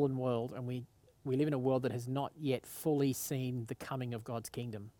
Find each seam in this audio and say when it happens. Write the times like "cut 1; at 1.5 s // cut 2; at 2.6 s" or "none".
none